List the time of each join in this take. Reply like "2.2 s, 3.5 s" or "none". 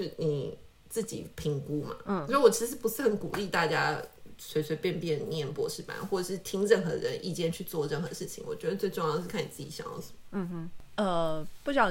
none